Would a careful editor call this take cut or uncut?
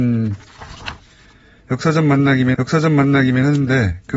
cut